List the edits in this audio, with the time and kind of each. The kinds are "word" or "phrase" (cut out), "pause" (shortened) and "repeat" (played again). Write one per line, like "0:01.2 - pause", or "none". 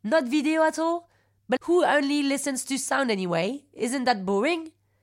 0:01.6 - word